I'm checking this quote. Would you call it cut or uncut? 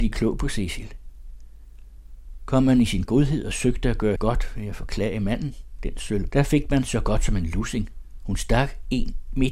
cut